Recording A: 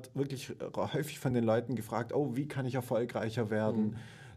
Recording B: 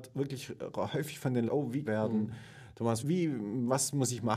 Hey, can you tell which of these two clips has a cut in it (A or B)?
B